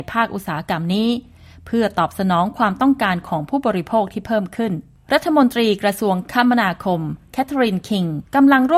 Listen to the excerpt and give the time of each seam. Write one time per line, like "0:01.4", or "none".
none